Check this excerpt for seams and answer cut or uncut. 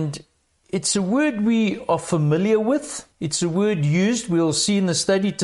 cut